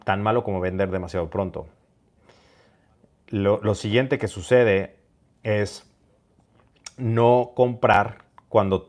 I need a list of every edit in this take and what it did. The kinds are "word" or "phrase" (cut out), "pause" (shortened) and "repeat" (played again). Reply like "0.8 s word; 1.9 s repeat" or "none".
none